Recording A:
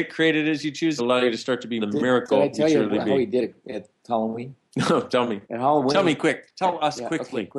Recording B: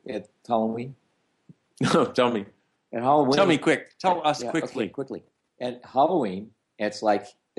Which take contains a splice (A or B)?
A